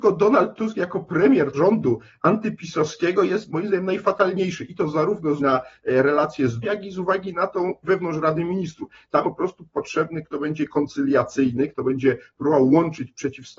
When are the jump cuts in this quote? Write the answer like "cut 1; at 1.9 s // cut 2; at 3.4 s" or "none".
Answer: cut 1; at 1.5 s // cut 2; at 5.4 s // cut 3; at 6.6 s // cut 4; at 7.8 s // cut 5; at 9.2 s // cut 6; at 10.2 s